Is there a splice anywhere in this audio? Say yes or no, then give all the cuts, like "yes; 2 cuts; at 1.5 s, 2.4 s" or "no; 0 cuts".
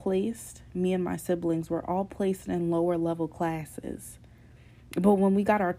no; 0 cuts